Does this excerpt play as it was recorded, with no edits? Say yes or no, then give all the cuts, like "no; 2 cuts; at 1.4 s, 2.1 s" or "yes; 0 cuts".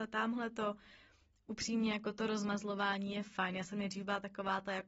yes; 0 cuts